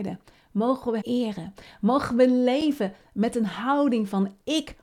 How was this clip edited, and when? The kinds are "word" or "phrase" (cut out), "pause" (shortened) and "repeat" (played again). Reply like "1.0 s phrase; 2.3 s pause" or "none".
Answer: 1.0 s word